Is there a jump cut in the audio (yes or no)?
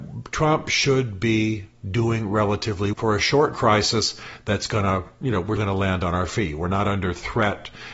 yes